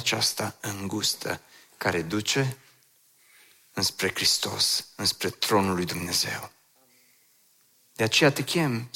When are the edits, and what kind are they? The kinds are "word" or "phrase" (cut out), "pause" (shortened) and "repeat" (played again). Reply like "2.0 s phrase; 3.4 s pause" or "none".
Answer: none